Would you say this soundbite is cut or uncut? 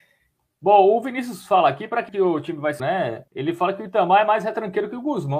cut